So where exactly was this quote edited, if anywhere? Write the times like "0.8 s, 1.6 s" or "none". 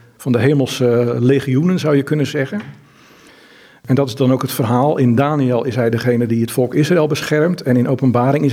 none